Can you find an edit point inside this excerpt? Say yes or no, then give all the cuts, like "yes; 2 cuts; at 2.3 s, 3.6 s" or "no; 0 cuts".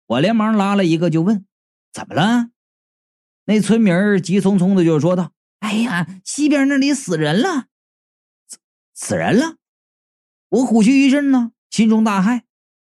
no; 0 cuts